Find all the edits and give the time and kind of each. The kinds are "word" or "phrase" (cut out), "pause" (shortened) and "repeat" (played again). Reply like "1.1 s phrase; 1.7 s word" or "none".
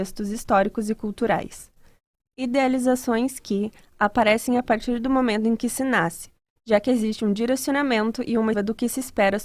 8.5 s word